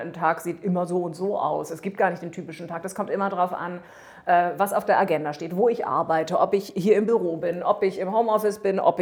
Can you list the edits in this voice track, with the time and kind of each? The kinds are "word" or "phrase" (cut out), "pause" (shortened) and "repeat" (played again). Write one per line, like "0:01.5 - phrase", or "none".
none